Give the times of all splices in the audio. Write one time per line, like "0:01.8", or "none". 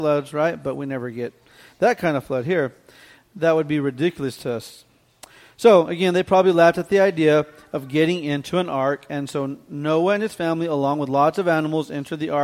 none